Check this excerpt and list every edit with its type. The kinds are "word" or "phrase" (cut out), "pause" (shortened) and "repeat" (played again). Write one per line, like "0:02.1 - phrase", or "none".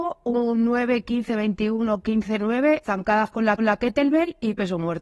0:02.8 - word
0:03.6 - repeat